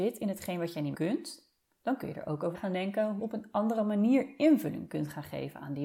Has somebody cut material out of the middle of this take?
yes; 3 cuts; at 0.9 s, 2.5 s, 3.2 s

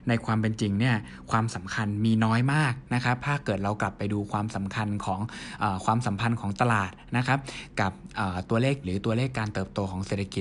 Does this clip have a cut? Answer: yes; 1 cut; at 8.8 s

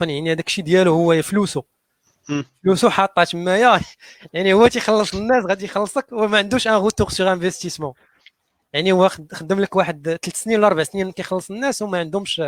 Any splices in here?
no; 0 cuts

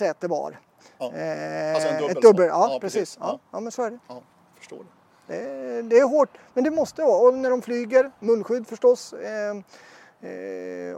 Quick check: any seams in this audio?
no; 0 cuts

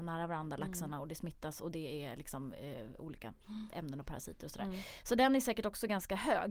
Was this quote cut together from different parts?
no; 0 cuts

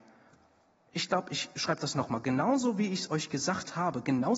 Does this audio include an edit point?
no; 0 cuts

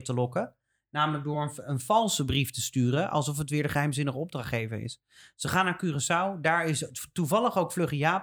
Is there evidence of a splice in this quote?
no; 0 cuts

